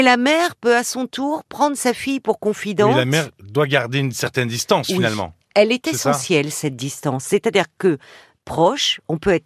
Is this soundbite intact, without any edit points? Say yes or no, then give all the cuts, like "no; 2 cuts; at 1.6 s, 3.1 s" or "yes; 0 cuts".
yes; 0 cuts